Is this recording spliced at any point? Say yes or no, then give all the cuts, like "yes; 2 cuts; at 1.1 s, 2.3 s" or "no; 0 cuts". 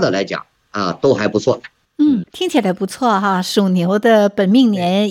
yes; 1 cut; at 2.2 s